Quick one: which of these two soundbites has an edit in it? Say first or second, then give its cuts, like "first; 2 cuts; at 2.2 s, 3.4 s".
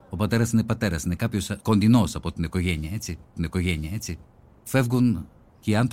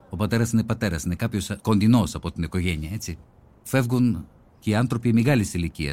first; 1 cut; at 3.3 s